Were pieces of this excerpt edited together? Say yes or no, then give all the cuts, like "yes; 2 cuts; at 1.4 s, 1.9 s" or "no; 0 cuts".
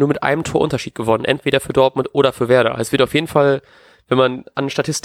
no; 0 cuts